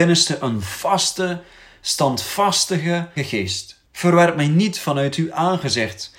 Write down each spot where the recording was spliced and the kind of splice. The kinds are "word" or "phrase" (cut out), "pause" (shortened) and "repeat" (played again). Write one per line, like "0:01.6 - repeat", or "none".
0:03.2 - word
0:03.9 - pause